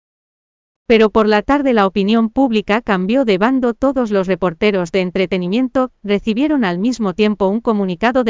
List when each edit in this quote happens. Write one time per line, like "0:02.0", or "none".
none

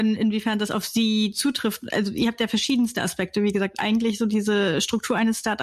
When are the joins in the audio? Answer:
none

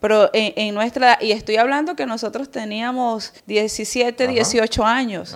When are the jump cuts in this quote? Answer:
0:03.4

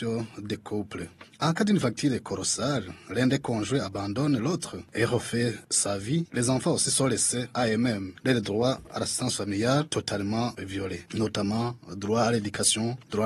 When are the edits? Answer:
none

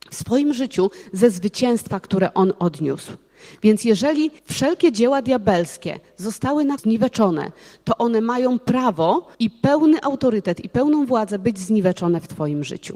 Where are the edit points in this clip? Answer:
0:04.4
0:06.8
0:09.3

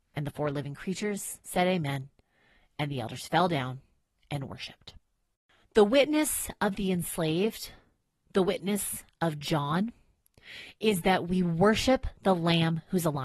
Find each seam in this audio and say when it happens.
0:01.4

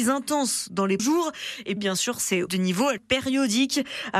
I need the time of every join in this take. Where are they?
0:01.0
0:01.8
0:02.5
0:03.0

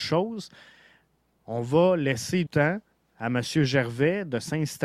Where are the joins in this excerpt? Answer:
0:02.5

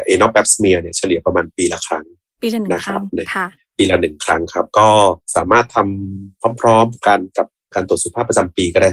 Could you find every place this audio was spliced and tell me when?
none

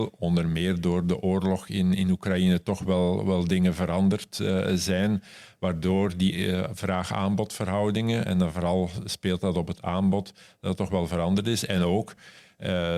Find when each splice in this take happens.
none

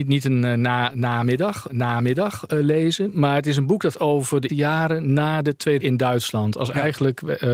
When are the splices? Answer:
0:01.7
0:03.9
0:04.5
0:05.8

